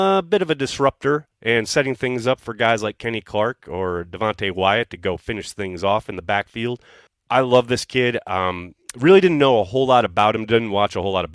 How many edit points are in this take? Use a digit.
1